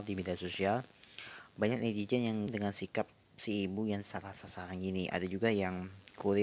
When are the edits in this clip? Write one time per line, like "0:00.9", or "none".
0:02.5